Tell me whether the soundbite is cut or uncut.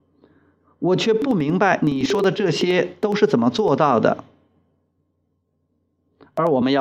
uncut